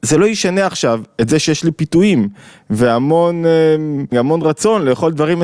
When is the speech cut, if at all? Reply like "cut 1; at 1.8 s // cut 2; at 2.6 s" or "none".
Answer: cut 1; at 4.1 s